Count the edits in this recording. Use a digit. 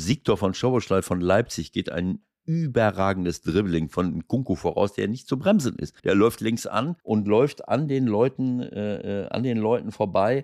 2